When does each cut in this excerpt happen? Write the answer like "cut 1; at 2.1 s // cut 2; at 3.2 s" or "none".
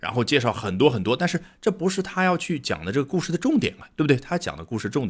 none